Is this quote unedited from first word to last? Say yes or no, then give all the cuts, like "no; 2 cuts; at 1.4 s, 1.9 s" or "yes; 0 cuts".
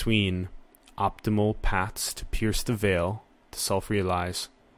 yes; 0 cuts